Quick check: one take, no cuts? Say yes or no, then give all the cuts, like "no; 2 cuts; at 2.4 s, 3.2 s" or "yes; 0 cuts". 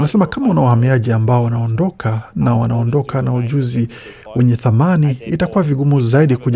yes; 0 cuts